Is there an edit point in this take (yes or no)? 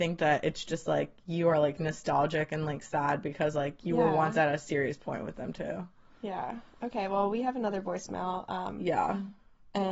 no